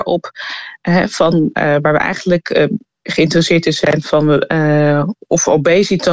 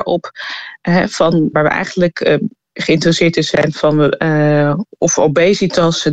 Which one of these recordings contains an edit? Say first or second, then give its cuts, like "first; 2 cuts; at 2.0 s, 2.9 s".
second; 1 cut; at 1.5 s